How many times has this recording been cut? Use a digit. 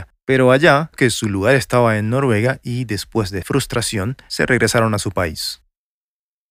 2